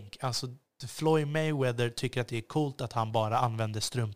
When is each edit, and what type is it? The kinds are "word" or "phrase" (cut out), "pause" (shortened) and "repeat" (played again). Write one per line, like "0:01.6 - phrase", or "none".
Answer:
none